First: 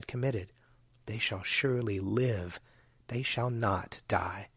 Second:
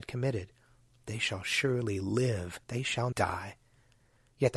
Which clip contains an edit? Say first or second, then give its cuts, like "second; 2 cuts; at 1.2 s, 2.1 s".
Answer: second; 2 cuts; at 2.6 s, 3.1 s